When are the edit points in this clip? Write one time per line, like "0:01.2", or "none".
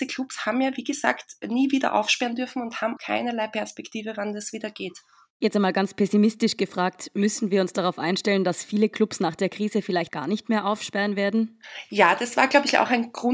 0:03.0
0:10.1